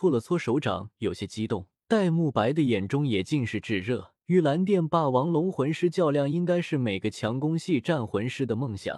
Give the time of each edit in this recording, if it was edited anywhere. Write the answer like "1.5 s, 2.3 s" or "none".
1.8 s, 4.2 s